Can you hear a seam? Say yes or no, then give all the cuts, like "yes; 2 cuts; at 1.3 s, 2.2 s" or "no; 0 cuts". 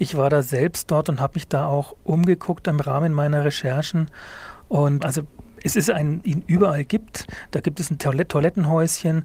yes; 2 cuts; at 5.0 s, 6.2 s